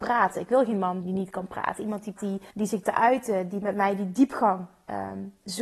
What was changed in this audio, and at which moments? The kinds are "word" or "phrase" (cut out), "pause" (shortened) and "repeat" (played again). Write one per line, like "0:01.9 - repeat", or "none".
0:01.0 - word
0:02.2 - word
0:02.5 - pause
0:02.8 - word